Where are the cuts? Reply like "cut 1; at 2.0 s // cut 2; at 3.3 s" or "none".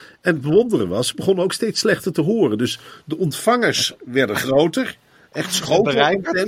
none